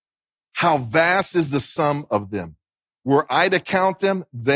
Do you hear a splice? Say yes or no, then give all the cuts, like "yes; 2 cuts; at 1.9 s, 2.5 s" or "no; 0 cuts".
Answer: no; 0 cuts